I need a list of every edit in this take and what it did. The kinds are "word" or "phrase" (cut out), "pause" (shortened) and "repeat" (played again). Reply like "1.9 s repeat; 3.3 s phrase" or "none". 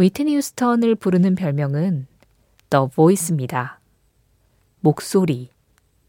none